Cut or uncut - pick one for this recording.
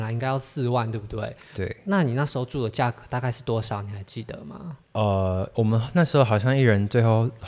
cut